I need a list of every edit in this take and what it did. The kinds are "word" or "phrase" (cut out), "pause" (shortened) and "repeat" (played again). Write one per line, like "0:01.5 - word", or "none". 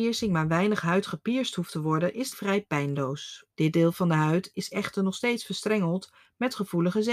0:02.3 - word
0:03.5 - pause